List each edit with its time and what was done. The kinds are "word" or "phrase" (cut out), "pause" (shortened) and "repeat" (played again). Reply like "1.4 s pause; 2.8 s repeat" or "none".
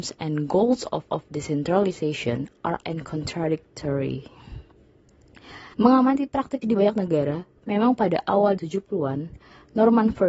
1.1 s repeat; 2.8 s word; 5.7 s pause; 6.6 s word; 7.6 s pause; 8.6 s word